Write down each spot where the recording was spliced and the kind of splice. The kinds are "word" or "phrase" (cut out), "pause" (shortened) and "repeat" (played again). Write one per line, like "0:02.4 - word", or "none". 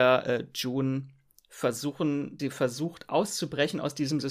0:02.4 - word